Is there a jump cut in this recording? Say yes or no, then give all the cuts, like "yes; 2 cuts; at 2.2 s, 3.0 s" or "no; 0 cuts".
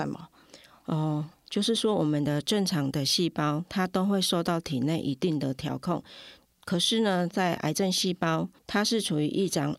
yes; 1 cut; at 8.6 s